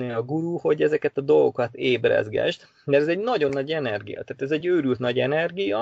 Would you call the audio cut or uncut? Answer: uncut